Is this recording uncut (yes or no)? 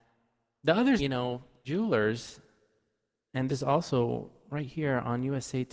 no